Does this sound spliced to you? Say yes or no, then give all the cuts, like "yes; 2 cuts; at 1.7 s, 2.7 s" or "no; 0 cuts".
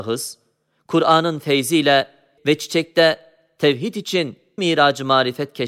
yes; 2 cuts; at 2.4 s, 4.6 s